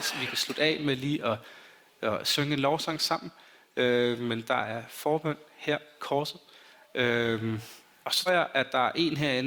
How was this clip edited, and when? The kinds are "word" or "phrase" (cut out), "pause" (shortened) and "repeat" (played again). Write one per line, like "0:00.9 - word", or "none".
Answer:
0:06.0 - phrase
0:08.3 - word